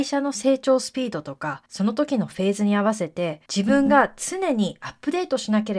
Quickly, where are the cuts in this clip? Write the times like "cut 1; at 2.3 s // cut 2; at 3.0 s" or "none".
cut 1; at 1.7 s // cut 2; at 3.5 s